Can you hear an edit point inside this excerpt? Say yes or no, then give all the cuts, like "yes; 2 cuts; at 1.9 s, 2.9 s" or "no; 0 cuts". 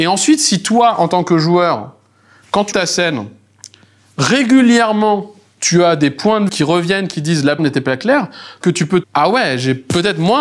yes; 5 cuts; at 2.7 s, 6.5 s, 7.6 s, 8.6 s, 9.0 s